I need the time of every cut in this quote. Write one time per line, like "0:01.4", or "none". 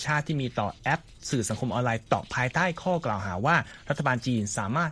0:02.1